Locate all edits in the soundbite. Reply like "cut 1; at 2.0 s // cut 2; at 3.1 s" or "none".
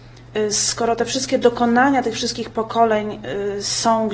none